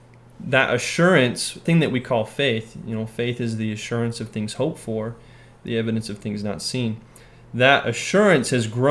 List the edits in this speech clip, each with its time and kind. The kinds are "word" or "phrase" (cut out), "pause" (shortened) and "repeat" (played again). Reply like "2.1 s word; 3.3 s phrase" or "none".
1.7 s word